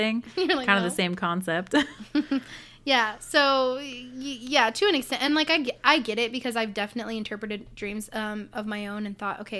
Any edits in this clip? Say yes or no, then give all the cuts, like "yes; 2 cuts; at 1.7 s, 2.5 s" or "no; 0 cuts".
no; 0 cuts